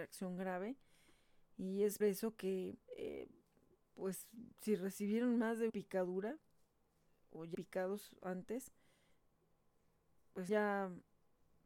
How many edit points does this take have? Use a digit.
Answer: 6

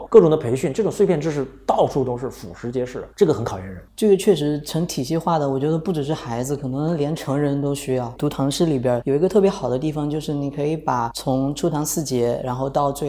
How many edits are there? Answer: 1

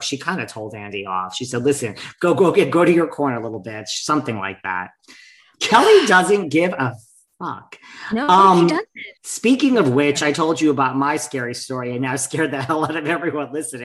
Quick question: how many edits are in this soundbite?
1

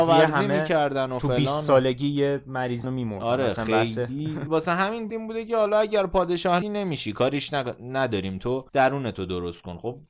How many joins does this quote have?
4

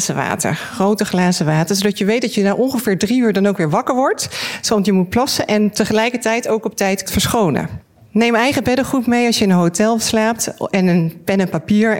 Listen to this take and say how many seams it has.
1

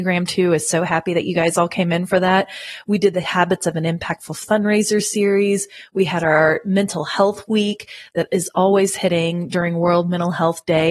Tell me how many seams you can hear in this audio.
0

